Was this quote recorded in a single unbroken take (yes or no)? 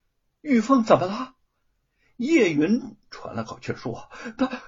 yes